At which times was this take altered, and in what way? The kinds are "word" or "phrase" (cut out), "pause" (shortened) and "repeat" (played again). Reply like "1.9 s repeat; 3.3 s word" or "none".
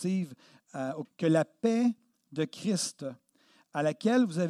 1.0 s word